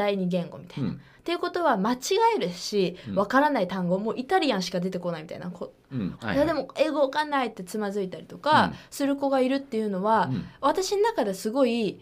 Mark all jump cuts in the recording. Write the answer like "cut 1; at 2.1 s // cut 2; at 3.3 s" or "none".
cut 1; at 6.2 s